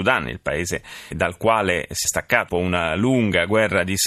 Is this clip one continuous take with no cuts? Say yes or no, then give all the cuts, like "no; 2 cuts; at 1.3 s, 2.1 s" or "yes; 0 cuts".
no; 3 cuts; at 1.1 s, 2.0 s, 2.5 s